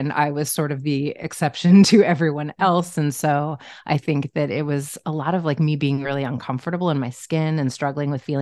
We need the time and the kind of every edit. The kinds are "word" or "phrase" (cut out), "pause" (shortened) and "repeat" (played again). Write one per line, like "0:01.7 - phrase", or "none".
none